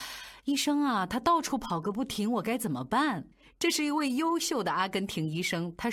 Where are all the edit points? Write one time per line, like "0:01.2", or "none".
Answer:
0:03.3